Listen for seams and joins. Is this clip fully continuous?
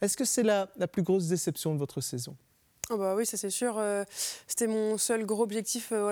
yes; 0 cuts

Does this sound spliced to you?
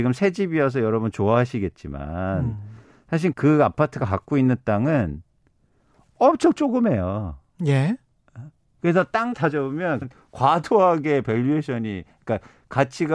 yes; 3 cuts; at 3.3 s, 9.3 s, 10.0 s

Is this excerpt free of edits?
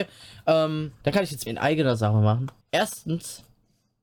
no; 3 cuts; at 1.0 s, 1.5 s, 2.6 s

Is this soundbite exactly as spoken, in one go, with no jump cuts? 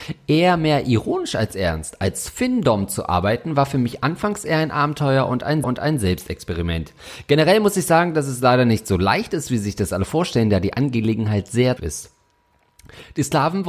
no; 2 cuts; at 5.6 s, 11.8 s

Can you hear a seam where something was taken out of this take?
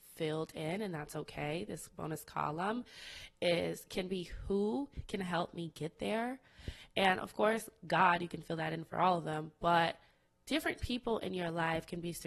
no; 0 cuts

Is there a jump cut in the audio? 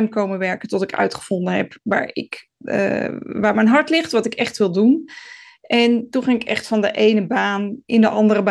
no; 0 cuts

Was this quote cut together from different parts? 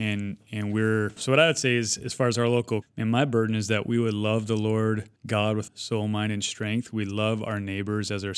yes; 4 cuts; at 1.2 s, 2.8 s, 5.2 s, 5.7 s

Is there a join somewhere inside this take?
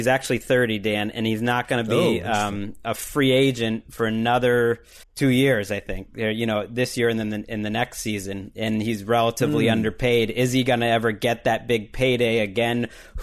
yes; 1 cut; at 5.0 s

